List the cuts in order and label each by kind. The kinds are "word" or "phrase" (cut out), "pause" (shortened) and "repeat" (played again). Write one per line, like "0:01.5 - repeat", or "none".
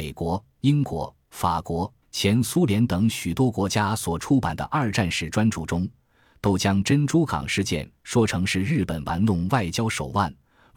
0:02.0 - pause